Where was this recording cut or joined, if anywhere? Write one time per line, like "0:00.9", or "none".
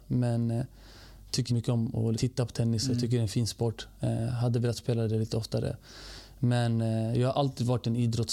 0:01.5
0:02.1